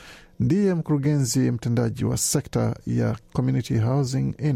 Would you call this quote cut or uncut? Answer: uncut